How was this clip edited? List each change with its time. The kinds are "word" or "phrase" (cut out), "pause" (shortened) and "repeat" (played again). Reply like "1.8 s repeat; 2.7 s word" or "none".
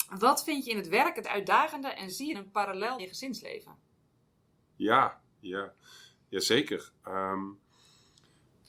1.2 s word; 2.3 s word; 3.0 s word